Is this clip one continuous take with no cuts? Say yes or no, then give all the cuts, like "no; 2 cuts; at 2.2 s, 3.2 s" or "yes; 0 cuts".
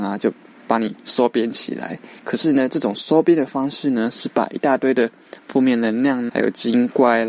no; 1 cut; at 6.3 s